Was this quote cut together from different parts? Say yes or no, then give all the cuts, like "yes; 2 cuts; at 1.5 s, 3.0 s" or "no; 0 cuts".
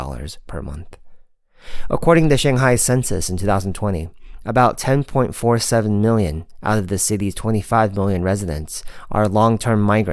no; 0 cuts